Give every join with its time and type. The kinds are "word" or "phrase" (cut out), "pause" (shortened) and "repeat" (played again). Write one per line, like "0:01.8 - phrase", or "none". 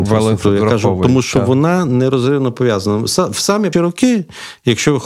0:03.7 - word